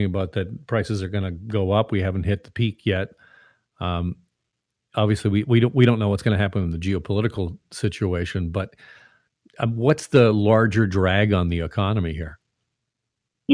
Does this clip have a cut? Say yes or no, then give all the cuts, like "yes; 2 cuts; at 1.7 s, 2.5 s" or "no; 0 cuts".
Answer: no; 0 cuts